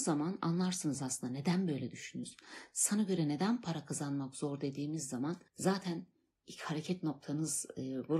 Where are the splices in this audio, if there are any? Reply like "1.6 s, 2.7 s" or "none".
5.5 s

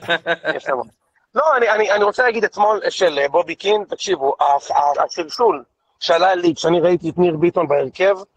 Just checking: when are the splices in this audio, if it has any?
2.9 s, 4.9 s

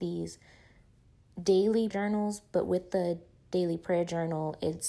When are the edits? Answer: 1.9 s

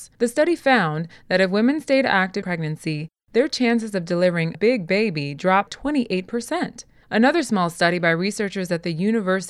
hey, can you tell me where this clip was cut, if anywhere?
2.4 s, 4.5 s, 5.7 s

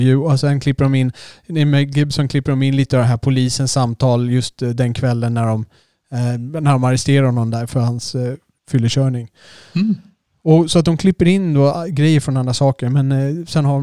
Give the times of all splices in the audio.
none

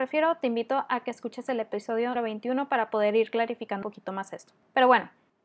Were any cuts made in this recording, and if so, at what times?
2.2 s, 3.8 s

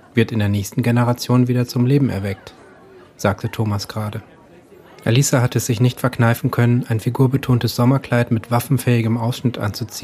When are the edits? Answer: none

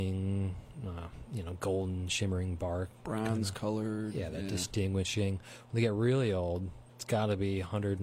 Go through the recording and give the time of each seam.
6.9 s

